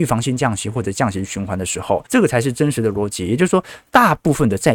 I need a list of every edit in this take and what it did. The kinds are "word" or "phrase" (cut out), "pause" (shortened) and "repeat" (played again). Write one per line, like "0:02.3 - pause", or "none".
0:02.1 - pause